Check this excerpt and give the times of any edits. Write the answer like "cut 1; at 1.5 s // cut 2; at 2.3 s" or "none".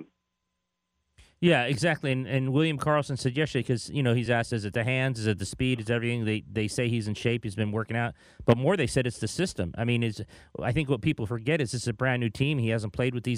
none